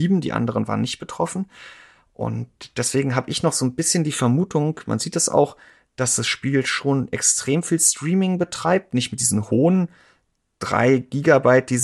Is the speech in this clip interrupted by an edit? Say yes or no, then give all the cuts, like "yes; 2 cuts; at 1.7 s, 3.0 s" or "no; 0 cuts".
no; 0 cuts